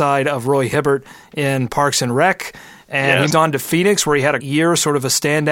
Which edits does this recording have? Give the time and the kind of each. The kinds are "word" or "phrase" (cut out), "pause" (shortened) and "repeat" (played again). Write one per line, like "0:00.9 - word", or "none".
0:03.3 - word
0:04.4 - word